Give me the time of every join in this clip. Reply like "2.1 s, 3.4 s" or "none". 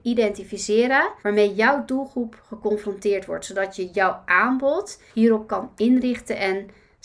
1.2 s, 5.1 s